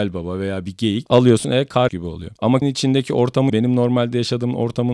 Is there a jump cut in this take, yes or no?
yes